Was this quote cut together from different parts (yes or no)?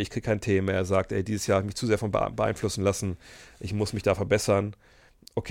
no